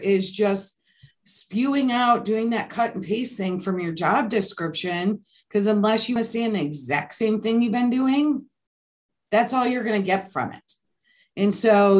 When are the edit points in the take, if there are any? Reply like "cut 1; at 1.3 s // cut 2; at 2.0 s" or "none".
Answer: cut 1; at 6.2 s